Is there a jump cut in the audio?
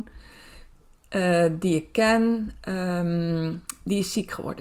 no; 0 cuts

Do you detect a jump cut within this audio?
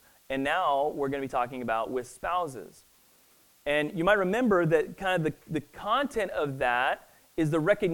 no; 0 cuts

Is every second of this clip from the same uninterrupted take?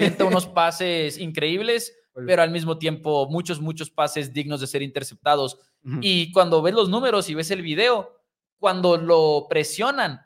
yes; 0 cuts

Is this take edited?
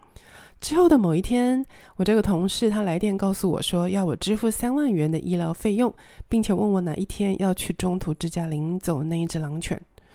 no; 0 cuts

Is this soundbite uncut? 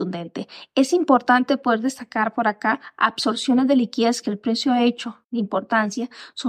no; 1 cut; at 5.2 s

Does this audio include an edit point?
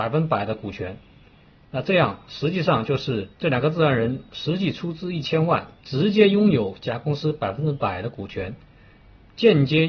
yes; 2 cuts; at 3.3 s, 5.8 s

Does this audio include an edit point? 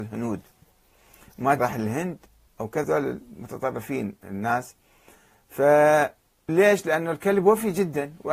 yes; 4 cuts; at 1.6 s, 2.5 s, 2.8 s, 6.5 s

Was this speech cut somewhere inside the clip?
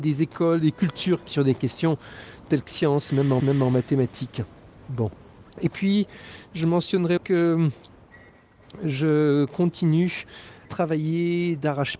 yes; 6 cuts; at 1.3 s, 2.7 s, 3.4 s, 5.5 s, 7.2 s, 10.7 s

